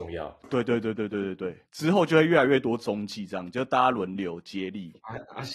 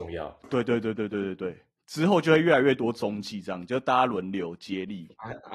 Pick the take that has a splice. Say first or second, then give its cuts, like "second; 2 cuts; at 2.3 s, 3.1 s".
first; 1 cut; at 1.6 s